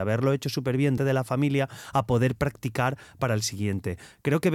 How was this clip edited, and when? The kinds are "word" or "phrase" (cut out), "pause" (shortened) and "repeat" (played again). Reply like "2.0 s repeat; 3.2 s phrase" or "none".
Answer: 1.0 s word